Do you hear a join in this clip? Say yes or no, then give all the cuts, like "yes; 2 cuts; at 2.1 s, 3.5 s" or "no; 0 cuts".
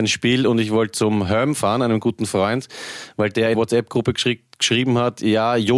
yes; 1 cut; at 3.5 s